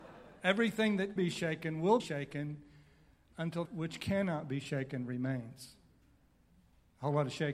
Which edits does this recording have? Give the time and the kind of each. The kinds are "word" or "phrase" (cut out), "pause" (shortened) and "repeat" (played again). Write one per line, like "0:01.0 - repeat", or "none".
0:01.2 - word
0:02.0 - word
0:03.6 - word